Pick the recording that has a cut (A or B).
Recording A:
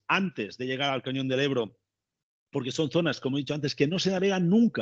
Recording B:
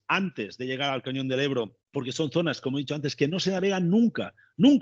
B